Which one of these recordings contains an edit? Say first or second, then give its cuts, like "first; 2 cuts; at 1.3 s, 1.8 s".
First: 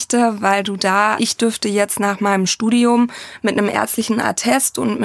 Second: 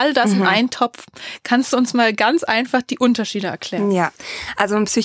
first; 1 cut; at 1.2 s